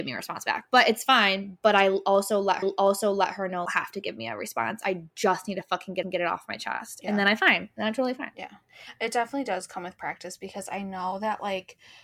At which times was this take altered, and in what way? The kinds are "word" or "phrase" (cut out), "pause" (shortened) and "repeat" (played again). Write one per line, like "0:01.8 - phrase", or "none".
0:02.6 - repeat
0:03.7 - phrase
0:06.0 - repeat